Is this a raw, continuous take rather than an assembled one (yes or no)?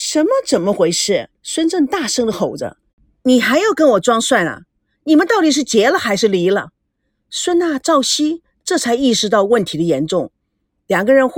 no